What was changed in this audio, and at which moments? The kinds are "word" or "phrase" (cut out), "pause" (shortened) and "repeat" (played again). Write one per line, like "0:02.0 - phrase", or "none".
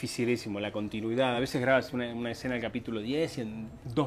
none